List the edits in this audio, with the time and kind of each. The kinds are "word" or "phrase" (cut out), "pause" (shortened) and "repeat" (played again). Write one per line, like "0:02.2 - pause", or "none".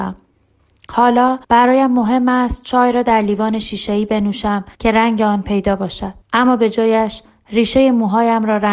0:01.4 - pause
0:04.7 - pause
0:06.2 - pause